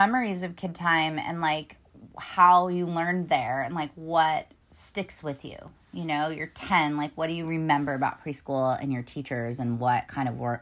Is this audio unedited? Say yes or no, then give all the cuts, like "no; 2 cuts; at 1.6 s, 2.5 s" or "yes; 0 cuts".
no; 1 cut; at 4.6 s